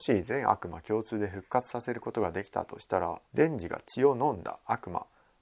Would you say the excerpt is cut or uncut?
cut